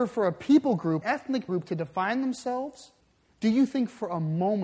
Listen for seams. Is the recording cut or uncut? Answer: cut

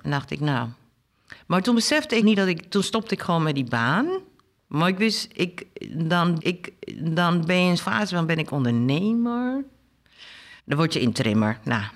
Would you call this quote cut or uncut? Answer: cut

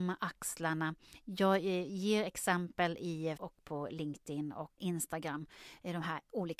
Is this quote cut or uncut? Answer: cut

